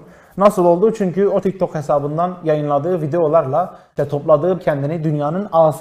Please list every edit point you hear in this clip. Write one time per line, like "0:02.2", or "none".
0:01.4
0:04.6